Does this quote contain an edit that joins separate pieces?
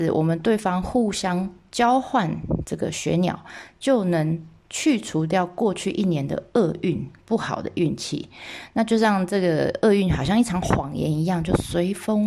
no; 0 cuts

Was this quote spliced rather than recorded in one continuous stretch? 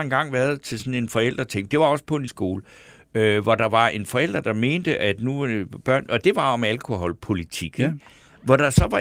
yes; 1 cut; at 2.3 s

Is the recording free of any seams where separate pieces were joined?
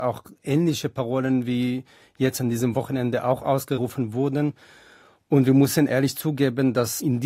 yes; 0 cuts

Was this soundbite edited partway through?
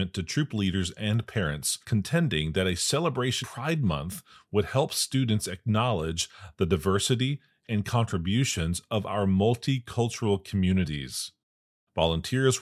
yes; 3 cuts; at 1.8 s, 3.4 s, 7.6 s

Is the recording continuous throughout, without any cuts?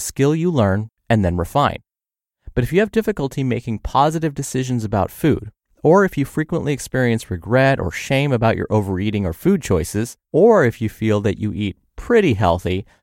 no; 1 cut; at 10.2 s

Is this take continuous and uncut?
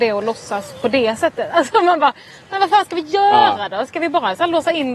yes; 0 cuts

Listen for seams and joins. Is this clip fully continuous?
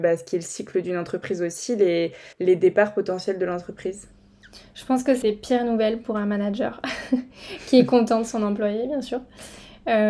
no; 2 cuts; at 2.3 s, 5.2 s

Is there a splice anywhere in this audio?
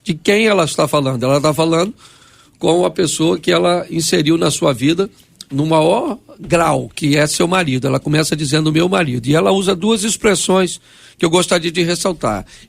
no; 0 cuts

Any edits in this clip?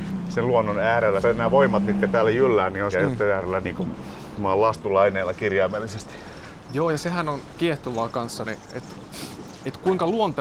yes; 4 cuts; at 1.2 s, 2.9 s, 3.6 s, 8.4 s

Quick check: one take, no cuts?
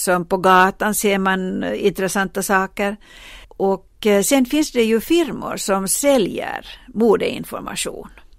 no; 1 cut; at 3.4 s

